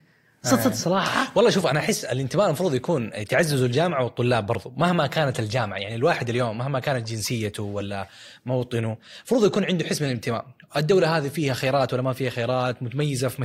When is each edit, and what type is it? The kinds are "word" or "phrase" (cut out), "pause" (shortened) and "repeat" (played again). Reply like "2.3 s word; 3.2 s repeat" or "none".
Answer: none